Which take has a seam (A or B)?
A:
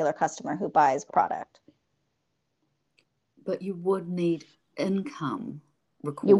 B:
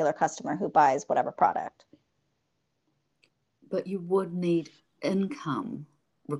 A